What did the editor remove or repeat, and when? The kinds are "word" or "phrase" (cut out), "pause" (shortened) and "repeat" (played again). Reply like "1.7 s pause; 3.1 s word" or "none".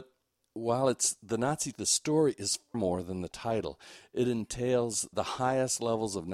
1.7 s word; 2.7 s word; 5.1 s word